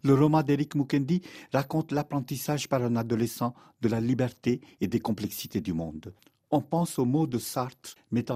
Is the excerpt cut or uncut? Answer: uncut